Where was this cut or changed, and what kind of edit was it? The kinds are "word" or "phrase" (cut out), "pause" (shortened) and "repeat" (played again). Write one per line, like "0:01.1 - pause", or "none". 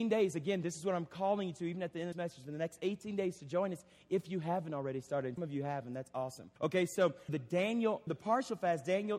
0:02.1 - phrase
0:05.4 - word
0:06.6 - pause
0:07.3 - word
0:08.1 - word

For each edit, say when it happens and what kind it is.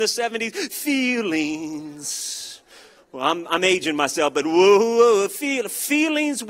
none

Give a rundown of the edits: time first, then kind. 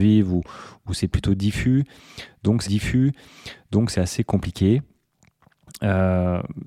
0:02.6 - repeat

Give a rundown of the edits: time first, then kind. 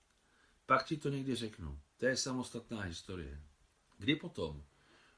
0:03.6 - pause

